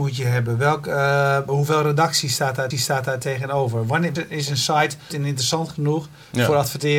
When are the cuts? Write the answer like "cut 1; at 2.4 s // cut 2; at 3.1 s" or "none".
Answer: cut 1; at 1.5 s // cut 2; at 2.7 s // cut 3; at 4.2 s // cut 4; at 5.1 s